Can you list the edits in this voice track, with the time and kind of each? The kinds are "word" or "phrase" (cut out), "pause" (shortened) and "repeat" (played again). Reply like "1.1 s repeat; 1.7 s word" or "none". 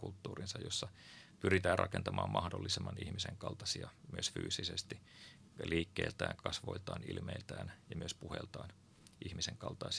none